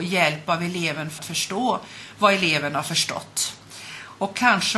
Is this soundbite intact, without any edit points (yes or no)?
no